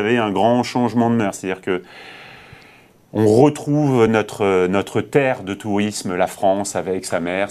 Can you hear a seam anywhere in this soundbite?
no; 0 cuts

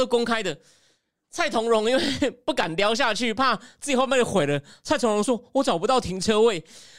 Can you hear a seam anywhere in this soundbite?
no; 0 cuts

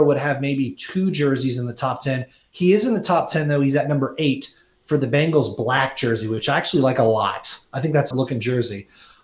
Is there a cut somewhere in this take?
yes; 1 cut; at 8.1 s

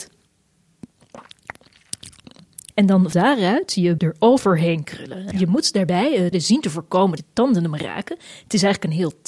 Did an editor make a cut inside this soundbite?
yes; 6 cuts; at 2.7 s, 3.1 s, 4.0 s, 5.3 s, 6.3 s, 7.2 s

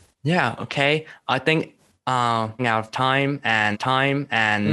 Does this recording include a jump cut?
yes; 2 cuts; at 2.6 s, 3.7 s

